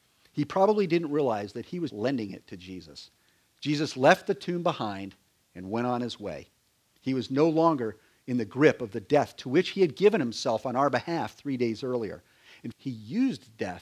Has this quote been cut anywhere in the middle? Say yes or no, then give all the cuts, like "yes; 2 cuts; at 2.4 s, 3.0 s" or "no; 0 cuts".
yes; 2 cuts; at 1.9 s, 12.7 s